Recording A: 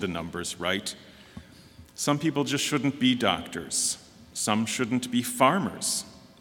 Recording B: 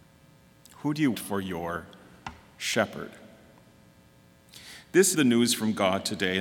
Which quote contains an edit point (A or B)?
B